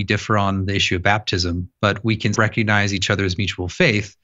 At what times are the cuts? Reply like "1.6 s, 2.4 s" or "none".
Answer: 2.3 s